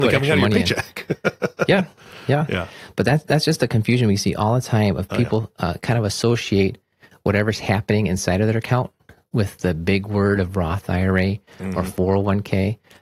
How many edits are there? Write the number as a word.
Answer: zero